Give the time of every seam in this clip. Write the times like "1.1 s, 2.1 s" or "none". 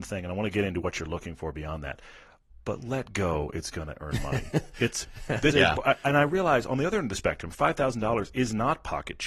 5.5 s